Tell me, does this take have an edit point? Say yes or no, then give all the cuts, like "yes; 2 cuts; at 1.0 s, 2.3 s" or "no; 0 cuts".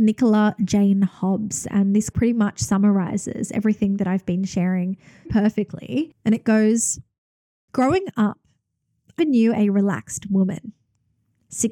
yes; 3 cuts; at 2.1 s, 5.3 s, 9.2 s